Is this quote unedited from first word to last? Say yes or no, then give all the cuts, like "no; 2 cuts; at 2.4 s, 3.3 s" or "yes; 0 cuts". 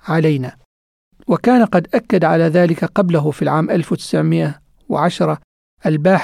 yes; 0 cuts